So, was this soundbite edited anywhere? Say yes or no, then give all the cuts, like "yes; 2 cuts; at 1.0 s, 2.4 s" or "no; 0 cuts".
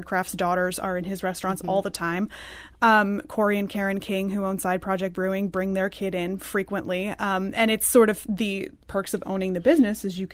no; 0 cuts